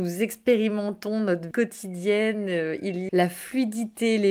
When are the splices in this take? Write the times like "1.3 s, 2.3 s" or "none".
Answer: 1.5 s, 3.1 s